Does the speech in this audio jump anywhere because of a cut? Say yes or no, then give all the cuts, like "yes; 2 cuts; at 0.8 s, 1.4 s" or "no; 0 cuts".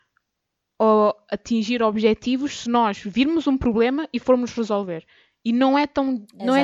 no; 0 cuts